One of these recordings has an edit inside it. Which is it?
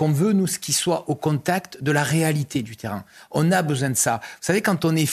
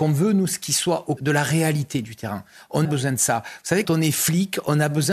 second; 3 cuts; at 1.2 s, 2.8 s, 3.8 s

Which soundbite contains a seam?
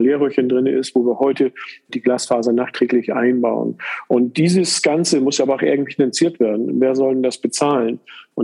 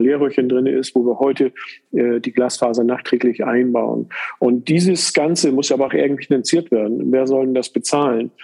first; 1 cut; at 1.9 s

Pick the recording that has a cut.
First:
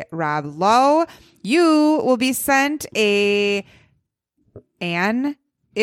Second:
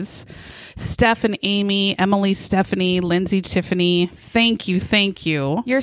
second; 1 cut; at 3.4 s

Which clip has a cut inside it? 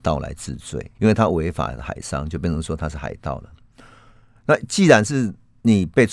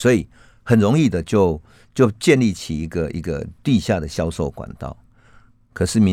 first; 1 cut; at 0.9 s

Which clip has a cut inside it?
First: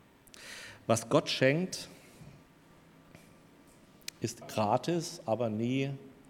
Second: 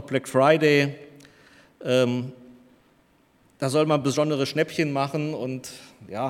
first; 1 cut; at 4.4 s

